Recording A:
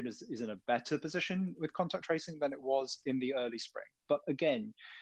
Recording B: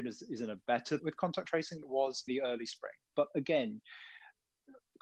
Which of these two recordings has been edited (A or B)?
B